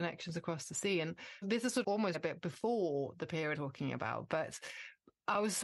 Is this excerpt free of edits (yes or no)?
no